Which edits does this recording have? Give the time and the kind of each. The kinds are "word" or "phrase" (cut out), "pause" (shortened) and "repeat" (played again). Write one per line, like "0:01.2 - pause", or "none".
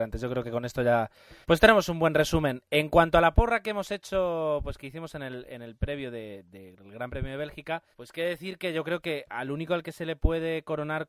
0:01.4 - pause
0:07.9 - pause